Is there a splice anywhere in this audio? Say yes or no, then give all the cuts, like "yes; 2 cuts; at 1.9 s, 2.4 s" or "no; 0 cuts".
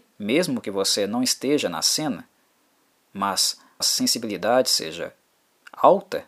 yes; 1 cut; at 3.8 s